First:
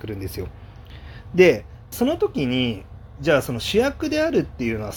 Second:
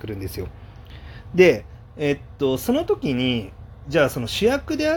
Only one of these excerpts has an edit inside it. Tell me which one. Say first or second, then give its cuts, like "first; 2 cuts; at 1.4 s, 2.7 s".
first; 1 cut; at 1.9 s